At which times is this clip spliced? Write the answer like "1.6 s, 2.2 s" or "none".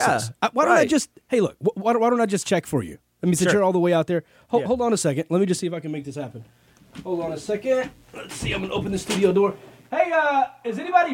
none